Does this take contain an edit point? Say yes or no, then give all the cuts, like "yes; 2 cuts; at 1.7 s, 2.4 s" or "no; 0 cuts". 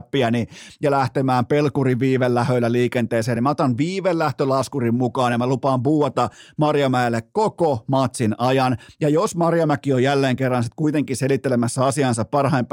no; 0 cuts